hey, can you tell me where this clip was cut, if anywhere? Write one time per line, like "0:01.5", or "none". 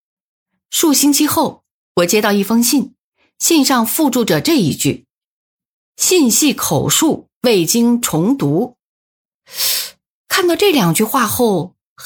none

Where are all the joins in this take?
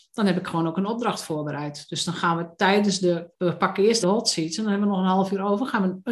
0:03.3
0:04.0

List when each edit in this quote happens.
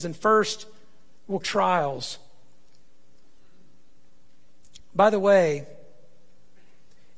0:01.4

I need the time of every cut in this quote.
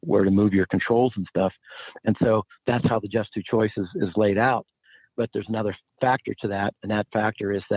none

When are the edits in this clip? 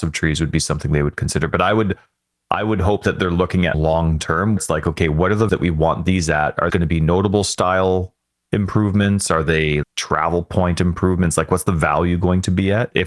0:03.7
0:04.6
0:05.5
0:06.7
0:09.8

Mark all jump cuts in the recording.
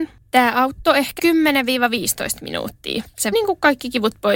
0:01.2
0:03.3

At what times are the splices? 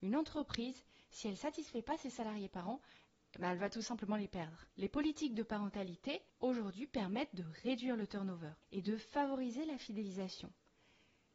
0:04.7
0:06.3
0:08.6

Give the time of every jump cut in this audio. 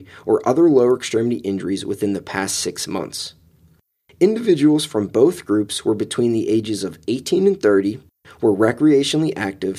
none

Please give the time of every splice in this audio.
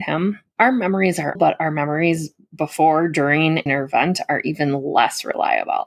0:01.3
0:03.7

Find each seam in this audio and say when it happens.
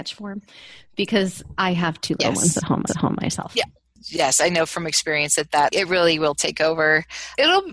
0:02.9

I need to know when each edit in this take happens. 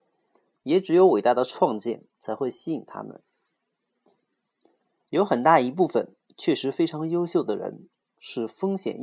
0:02.1

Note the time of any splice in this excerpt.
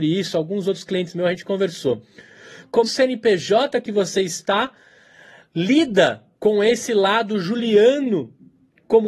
0:02.9
0:06.3

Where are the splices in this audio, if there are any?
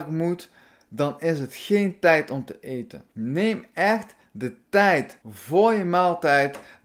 0:03.1
0:05.2

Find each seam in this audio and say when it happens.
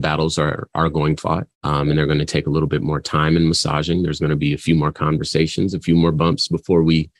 0:01.2
0:01.5

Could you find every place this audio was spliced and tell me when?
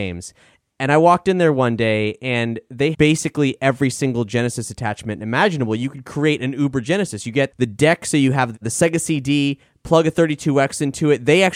0:02.9

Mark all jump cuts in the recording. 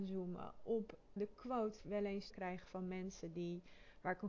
0:01.2
0:01.8
0:02.3

